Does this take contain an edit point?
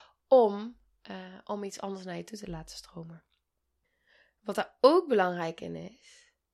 yes; 1 cut; at 3.8 s

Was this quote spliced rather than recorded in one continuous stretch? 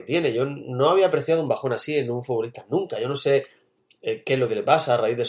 no; 0 cuts

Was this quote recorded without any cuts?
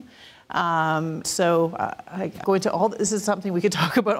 no; 2 cuts; at 1.2 s, 2.4 s

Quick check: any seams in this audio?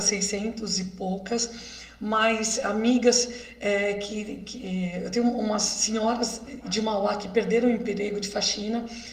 no; 0 cuts

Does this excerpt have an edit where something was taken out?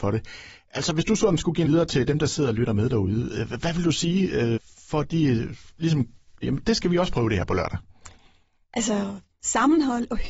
yes; 3 cuts; at 1.7 s, 4.6 s, 6.4 s

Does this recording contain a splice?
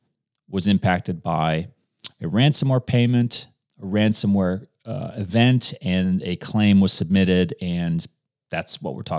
no; 0 cuts

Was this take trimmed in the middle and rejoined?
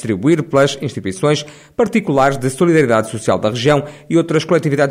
no; 0 cuts

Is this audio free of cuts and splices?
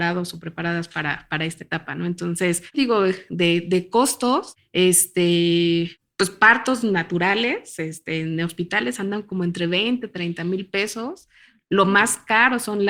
no; 1 cut; at 2.7 s

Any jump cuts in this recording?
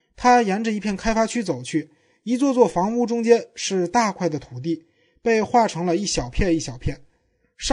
no; 0 cuts

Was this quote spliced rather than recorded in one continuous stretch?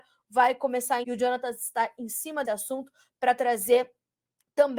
yes; 2 cuts; at 1.0 s, 2.4 s

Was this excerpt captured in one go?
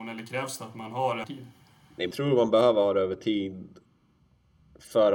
no; 2 cuts; at 1.2 s, 2.1 s

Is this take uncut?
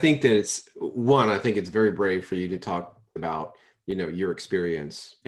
no; 1 cut; at 3.2 s

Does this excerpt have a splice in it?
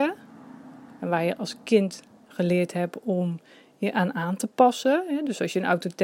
no; 0 cuts

